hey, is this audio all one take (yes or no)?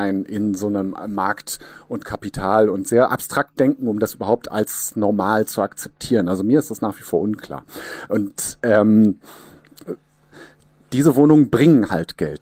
yes